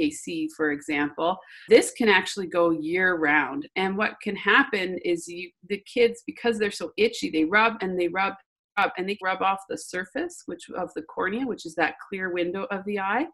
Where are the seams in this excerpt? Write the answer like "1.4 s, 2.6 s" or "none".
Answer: 1.7 s, 9.2 s